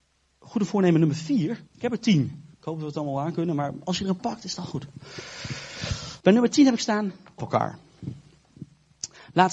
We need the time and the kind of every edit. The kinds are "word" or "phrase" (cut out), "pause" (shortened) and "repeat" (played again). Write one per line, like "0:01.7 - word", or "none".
0:01.7 - pause
0:02.5 - pause
0:04.2 - word
0:06.2 - pause
0:07.4 - word